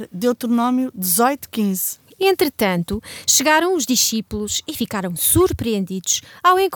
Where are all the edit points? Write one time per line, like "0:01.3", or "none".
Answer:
none